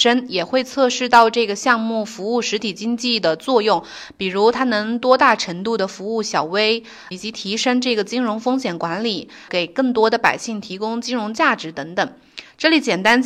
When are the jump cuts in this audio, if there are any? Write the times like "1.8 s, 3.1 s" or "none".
7.1 s, 9.5 s

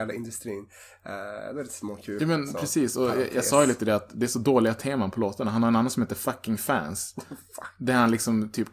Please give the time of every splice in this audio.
none

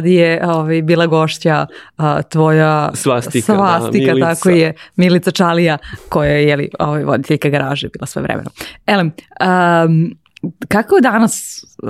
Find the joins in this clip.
none

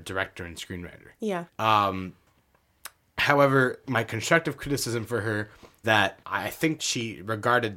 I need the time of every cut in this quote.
1.5 s, 3.8 s, 5.8 s, 6.2 s, 6.8 s

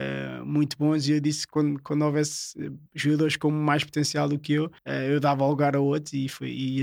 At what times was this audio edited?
2.9 s, 4.8 s

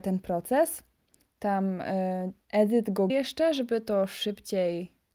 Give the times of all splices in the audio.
2.4 s, 3.1 s

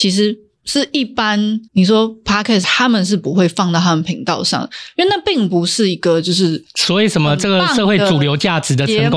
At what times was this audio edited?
1.7 s, 2.6 s

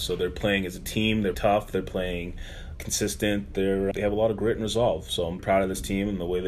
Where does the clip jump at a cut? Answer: 1.3 s, 2.7 s, 3.9 s, 5.4 s

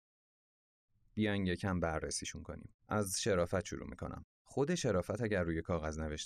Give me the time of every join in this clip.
2.8 s, 4.3 s

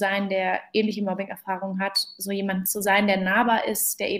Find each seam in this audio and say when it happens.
none

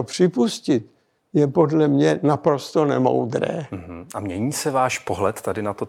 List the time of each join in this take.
none

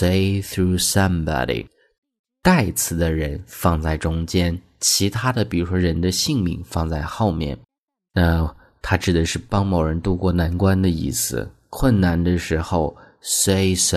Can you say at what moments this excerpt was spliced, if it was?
none

